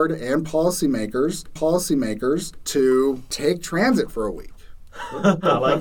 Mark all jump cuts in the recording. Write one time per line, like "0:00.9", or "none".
0:01.6